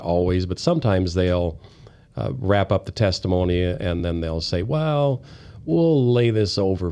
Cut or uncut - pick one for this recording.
uncut